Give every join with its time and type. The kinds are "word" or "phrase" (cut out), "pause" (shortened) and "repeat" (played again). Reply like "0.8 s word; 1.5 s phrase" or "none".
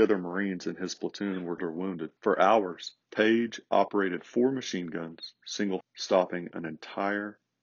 1.6 s word; 2.2 s pause; 3.0 s pause; 5.8 s word